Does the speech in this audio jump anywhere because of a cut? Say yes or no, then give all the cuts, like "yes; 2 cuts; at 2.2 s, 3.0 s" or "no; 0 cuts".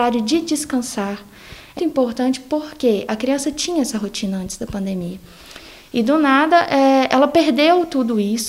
yes; 1 cut; at 1.8 s